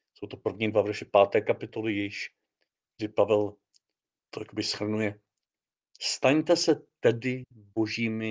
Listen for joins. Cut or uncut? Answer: uncut